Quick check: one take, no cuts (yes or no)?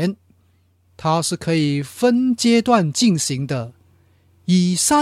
yes